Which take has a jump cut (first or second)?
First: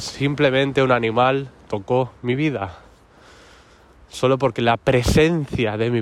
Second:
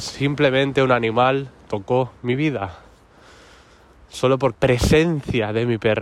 second